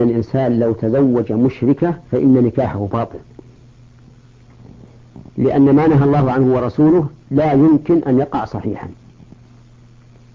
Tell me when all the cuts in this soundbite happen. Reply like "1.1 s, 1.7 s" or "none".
2.0 s, 5.3 s